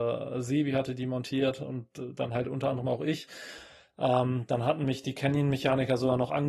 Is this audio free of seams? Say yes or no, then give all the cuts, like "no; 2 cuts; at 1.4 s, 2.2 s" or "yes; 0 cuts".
yes; 0 cuts